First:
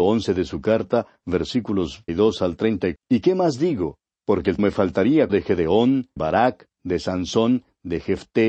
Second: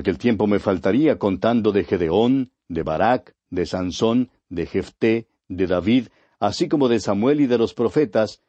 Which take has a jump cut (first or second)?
first